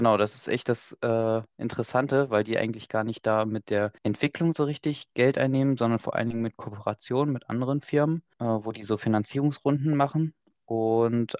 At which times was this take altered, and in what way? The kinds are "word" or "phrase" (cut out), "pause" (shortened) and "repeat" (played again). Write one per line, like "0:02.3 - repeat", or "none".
0:04.0 - pause
0:08.3 - pause